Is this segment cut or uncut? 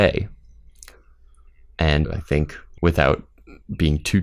cut